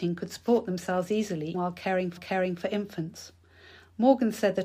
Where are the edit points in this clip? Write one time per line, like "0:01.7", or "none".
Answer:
0:01.5
0:02.2